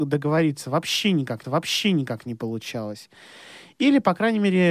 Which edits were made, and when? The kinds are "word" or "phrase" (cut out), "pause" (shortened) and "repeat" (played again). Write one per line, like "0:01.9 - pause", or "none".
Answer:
0:01.4 - repeat